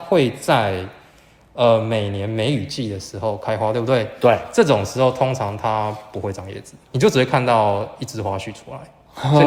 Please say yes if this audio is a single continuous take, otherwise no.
yes